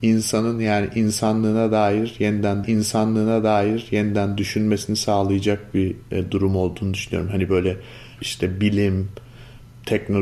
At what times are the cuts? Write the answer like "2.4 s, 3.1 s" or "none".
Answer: 2.6 s, 8.2 s